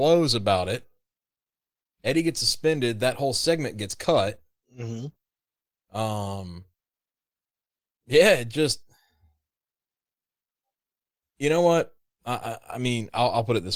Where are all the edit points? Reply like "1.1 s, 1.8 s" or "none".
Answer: none